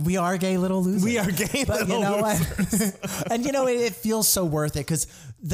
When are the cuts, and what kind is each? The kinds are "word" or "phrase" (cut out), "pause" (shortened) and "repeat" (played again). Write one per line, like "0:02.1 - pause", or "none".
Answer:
none